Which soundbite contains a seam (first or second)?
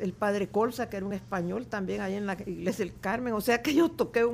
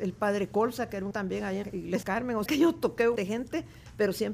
second